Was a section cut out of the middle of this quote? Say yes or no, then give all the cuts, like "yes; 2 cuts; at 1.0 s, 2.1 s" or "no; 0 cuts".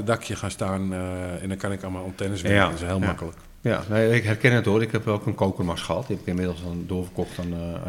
no; 0 cuts